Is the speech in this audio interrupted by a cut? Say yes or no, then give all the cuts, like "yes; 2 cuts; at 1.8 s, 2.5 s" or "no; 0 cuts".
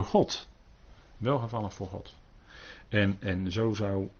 no; 0 cuts